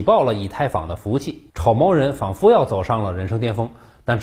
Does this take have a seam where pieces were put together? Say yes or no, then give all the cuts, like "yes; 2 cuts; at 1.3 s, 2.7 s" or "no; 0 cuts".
yes; 1 cut; at 1.5 s